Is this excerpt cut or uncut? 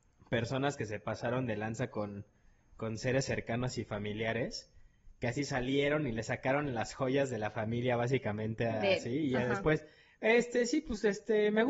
uncut